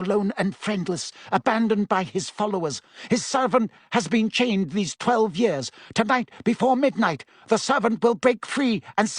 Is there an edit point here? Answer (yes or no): no